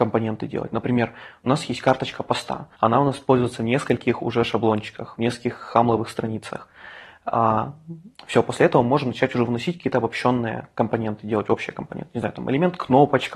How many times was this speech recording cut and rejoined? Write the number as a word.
two